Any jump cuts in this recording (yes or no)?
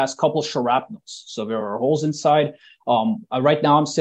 no